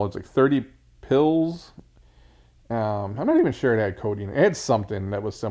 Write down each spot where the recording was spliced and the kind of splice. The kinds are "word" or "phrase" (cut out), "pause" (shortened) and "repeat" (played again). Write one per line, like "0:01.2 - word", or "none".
none